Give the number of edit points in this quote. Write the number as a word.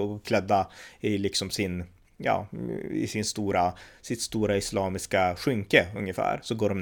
zero